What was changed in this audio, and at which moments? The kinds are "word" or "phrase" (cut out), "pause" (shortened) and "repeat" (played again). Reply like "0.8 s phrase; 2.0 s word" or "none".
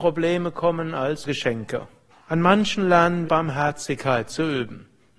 1.2 s word; 2.1 s pause; 3.2 s word